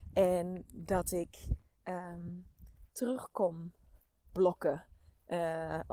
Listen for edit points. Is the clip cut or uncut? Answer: uncut